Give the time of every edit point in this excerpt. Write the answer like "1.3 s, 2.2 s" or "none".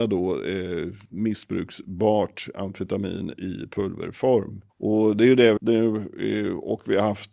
4.7 s, 5.6 s